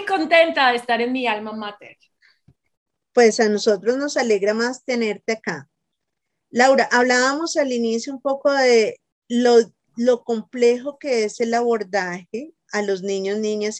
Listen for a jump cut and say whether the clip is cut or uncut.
uncut